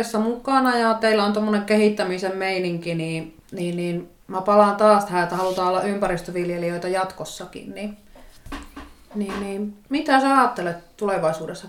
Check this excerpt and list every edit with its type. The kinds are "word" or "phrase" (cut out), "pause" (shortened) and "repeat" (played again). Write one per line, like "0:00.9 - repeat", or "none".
0:04.2 - pause
0:09.8 - pause